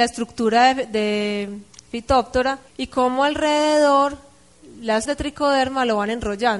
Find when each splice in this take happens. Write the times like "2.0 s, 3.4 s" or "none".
2.7 s, 5.0 s